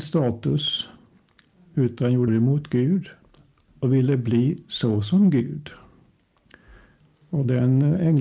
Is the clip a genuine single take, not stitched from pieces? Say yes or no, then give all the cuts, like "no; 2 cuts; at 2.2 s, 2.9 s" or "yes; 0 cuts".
no; 1 cut; at 2.3 s